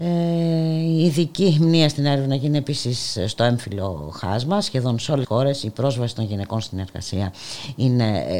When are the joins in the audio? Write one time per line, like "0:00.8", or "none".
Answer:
0:05.2